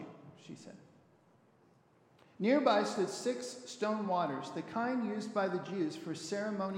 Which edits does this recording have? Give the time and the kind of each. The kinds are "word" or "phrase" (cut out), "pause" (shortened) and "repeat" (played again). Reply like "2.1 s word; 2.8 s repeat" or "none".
none